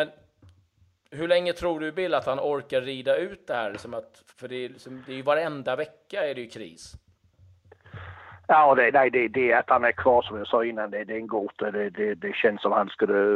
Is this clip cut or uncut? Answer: cut